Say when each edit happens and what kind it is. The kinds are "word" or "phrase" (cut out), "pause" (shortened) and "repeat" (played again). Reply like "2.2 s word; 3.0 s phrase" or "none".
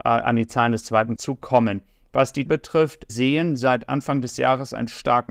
1.2 s word; 2.5 s word; 3.1 s word